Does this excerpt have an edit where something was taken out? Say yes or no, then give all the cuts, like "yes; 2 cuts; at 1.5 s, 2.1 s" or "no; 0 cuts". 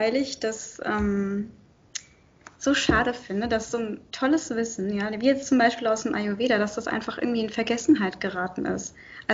no; 0 cuts